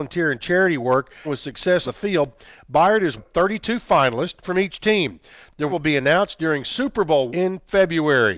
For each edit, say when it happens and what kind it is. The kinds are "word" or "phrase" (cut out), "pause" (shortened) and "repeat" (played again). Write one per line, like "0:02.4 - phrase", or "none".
0:01.2 - word
0:01.8 - word
0:03.2 - word
0:04.4 - word
0:05.7 - word
0:07.3 - word